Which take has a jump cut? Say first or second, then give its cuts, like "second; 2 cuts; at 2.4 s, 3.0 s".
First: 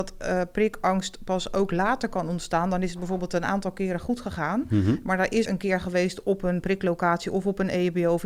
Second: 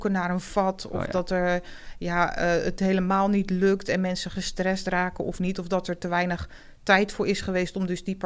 first; 1 cut; at 5.4 s